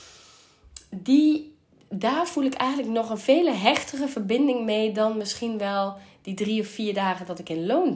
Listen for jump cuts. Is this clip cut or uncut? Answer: uncut